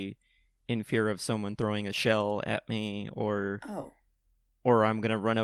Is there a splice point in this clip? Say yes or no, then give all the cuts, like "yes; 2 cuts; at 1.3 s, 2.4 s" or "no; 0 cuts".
no; 0 cuts